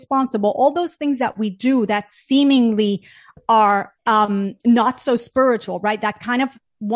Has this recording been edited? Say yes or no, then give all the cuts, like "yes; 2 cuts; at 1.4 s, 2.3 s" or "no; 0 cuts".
yes; 1 cut; at 4.0 s